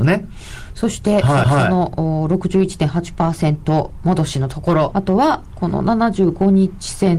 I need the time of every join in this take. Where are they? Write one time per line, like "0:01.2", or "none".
0:01.4
0:04.9